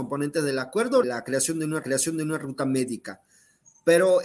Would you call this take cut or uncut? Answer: cut